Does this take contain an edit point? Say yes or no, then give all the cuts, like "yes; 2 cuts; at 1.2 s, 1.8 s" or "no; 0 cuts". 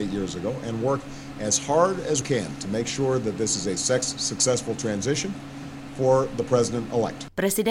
yes; 1 cut; at 2.2 s